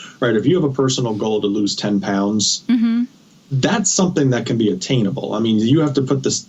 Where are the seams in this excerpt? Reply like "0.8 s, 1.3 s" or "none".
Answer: none

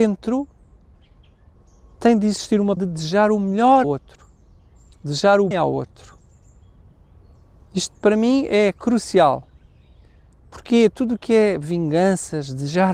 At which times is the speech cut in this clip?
2.8 s, 3.8 s, 5.5 s

